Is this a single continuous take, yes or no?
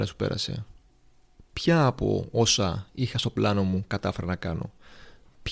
yes